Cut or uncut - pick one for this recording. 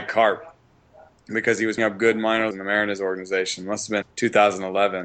cut